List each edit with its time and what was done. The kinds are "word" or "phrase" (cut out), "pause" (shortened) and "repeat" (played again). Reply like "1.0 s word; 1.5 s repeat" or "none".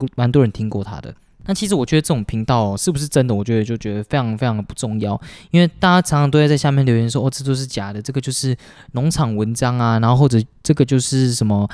none